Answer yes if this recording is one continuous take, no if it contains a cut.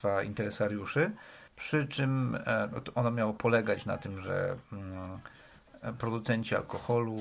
no